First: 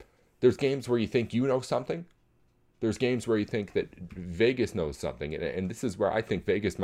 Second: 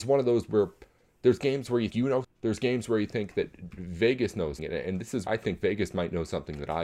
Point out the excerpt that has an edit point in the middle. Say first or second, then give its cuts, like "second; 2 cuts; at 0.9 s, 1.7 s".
second; 4 cuts; at 1.9 s, 2.2 s, 4.6 s, 5.3 s